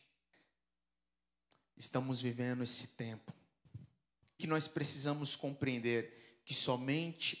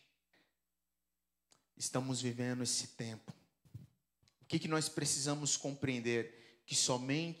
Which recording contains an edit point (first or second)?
first